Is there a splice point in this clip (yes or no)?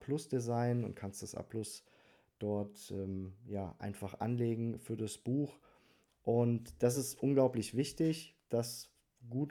no